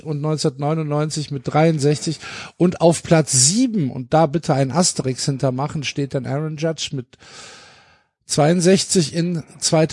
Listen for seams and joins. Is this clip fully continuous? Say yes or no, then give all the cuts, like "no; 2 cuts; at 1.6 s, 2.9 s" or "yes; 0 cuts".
yes; 0 cuts